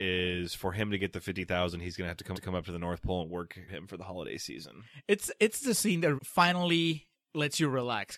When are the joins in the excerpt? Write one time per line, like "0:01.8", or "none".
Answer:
0:02.3
0:03.7
0:06.2